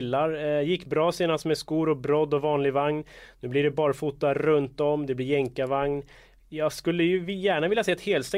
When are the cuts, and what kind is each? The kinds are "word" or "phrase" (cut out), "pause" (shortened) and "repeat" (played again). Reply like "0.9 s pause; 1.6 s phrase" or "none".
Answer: none